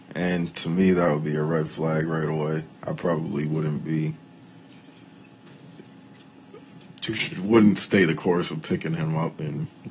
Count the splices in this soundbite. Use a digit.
1